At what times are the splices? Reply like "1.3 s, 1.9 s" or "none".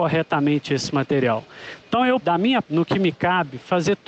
2.2 s, 2.6 s